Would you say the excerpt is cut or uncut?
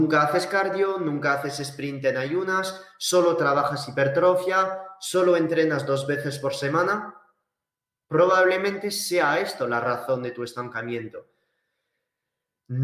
uncut